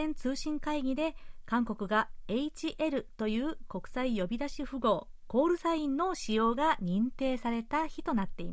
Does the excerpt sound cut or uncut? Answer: uncut